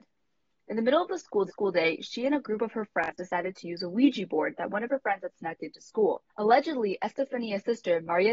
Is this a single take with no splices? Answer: no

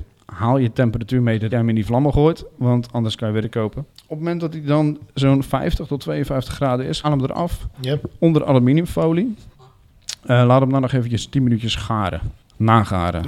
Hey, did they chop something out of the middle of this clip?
yes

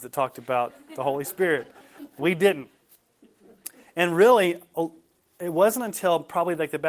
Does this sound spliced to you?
no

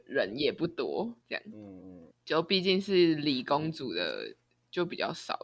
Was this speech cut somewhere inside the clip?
yes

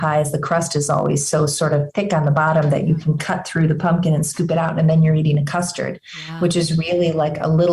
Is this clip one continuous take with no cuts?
yes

